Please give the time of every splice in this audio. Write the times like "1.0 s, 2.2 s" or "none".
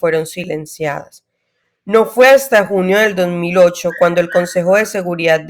none